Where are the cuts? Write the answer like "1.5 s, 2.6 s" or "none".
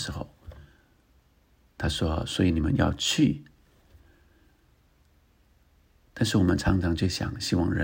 none